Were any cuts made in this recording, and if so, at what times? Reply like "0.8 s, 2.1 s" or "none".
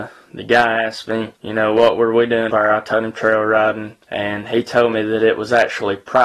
1.4 s, 2.5 s, 4.0 s

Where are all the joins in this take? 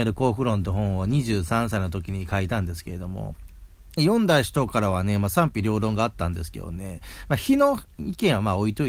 4.0 s

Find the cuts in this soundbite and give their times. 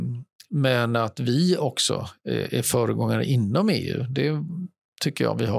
none

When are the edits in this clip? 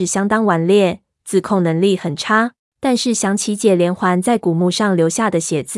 2.6 s

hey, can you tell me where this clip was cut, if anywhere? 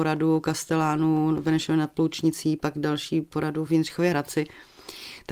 none

